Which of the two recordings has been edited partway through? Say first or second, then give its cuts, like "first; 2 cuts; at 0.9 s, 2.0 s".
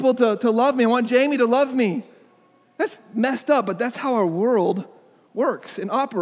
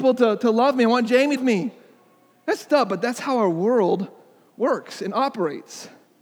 second; 2 cuts; at 1.4 s, 2.7 s